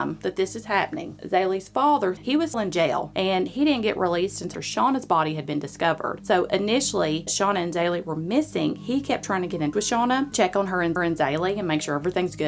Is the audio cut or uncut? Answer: cut